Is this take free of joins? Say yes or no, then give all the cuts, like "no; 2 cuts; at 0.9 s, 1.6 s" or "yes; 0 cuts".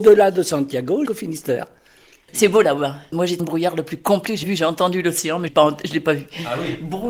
no; 4 cuts; at 1.1 s, 3.4 s, 4.4 s, 5.5 s